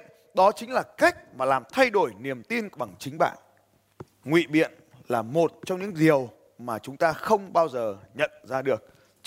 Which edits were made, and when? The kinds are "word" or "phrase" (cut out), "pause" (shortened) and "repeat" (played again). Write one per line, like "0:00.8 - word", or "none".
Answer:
0:02.7 - word
0:04.1 - pause